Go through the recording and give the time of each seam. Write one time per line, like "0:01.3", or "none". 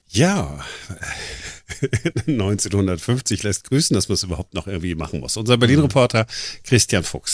none